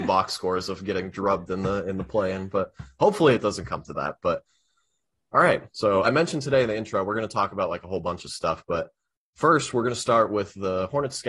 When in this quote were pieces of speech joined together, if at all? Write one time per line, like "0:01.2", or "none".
0:06.0